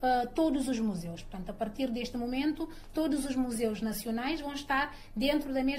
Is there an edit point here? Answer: no; 0 cuts

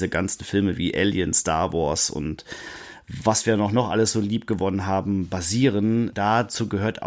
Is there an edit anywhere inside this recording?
no; 0 cuts

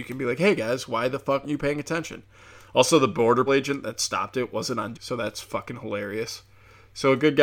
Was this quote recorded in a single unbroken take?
no; 3 cuts; at 1.4 s, 3.5 s, 4.9 s

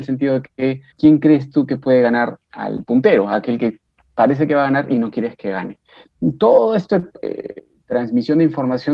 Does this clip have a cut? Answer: yes; 3 cuts; at 0.9 s, 2.4 s, 7.1 s

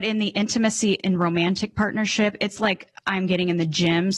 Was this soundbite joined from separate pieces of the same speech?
no; 0 cuts

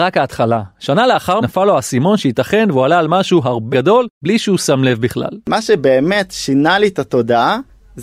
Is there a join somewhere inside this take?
yes; 3 cuts; at 1.4 s, 3.7 s, 4.1 s

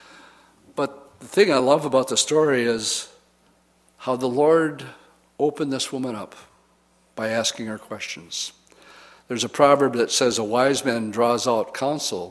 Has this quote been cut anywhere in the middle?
no; 0 cuts

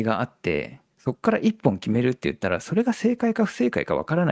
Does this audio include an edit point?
yes; 1 cut; at 0.9 s

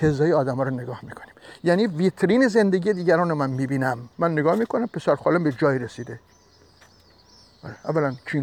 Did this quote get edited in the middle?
yes; 1 cut; at 4.1 s

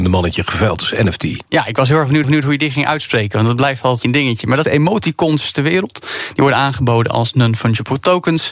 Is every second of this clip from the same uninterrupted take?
no; 3 cuts; at 2.2 s, 4.0 s, 4.6 s

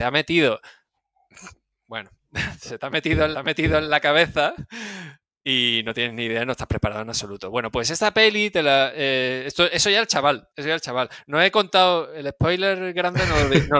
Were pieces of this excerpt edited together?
yes; 2 cuts; at 3.3 s, 10.5 s

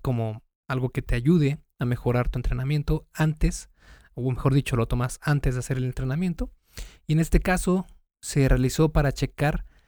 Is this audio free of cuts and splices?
yes; 0 cuts

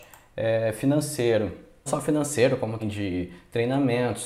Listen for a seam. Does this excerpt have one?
yes; 2 cuts; at 1.9 s, 2.8 s

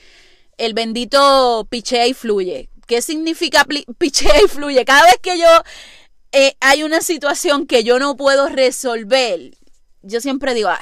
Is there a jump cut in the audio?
no; 0 cuts

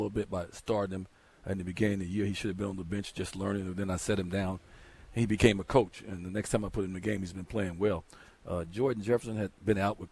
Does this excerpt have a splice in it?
no; 0 cuts

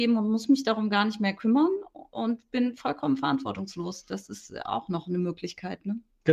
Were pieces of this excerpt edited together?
no; 0 cuts

